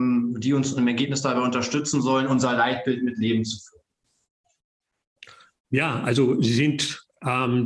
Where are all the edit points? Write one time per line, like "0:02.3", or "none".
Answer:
0:05.6